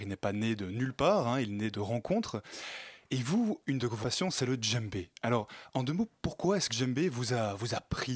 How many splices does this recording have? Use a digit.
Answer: 3